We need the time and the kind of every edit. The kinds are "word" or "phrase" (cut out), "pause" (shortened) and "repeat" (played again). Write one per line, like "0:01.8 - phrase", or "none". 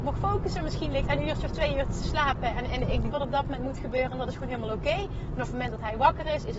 0:01.1 - word
0:03.1 - phrase